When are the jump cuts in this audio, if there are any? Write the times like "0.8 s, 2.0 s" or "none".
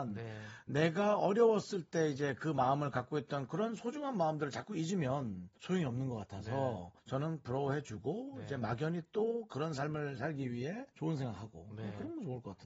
5.6 s, 7.0 s, 10.9 s